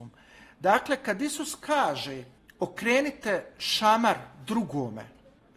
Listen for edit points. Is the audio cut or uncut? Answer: uncut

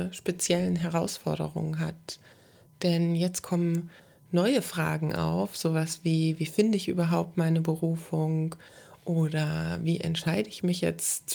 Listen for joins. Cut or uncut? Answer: uncut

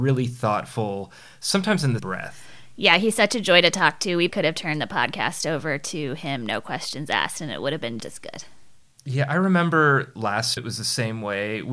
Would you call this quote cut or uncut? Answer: cut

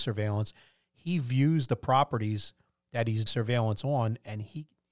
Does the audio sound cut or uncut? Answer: cut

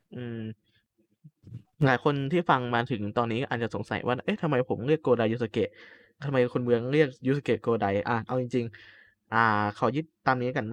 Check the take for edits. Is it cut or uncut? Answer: uncut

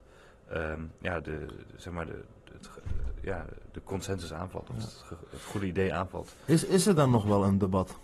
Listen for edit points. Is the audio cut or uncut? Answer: cut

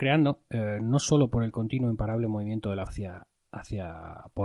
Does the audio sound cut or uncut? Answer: cut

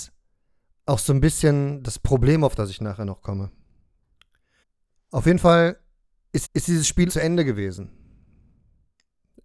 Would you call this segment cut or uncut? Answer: cut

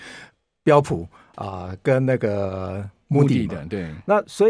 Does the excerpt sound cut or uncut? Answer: uncut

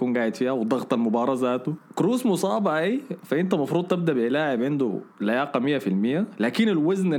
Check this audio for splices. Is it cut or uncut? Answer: cut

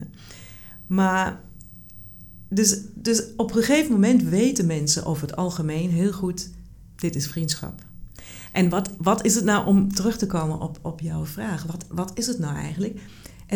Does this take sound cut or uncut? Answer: cut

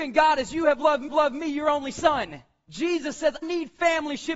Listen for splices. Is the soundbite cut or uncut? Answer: cut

